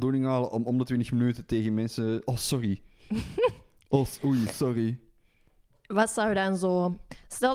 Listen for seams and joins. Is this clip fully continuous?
yes; 0 cuts

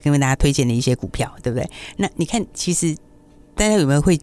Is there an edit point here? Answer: no; 0 cuts

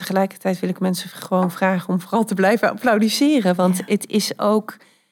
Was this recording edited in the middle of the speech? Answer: no; 0 cuts

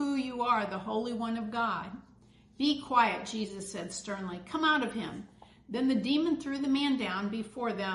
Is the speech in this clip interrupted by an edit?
no; 0 cuts

